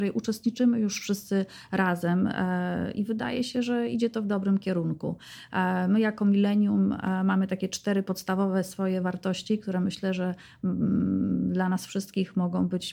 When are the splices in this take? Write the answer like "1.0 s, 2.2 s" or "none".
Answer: none